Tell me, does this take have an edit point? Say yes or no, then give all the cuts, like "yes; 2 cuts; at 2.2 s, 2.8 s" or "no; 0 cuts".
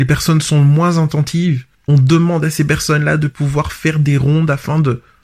yes; 1 cut; at 1.7 s